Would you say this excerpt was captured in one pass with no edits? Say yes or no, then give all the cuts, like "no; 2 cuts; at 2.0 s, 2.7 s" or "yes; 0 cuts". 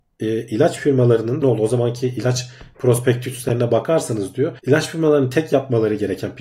no; 2 cuts; at 1.4 s, 4.6 s